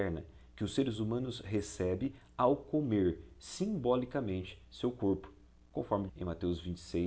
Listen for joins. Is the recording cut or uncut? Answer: cut